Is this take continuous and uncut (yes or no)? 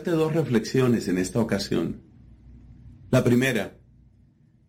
yes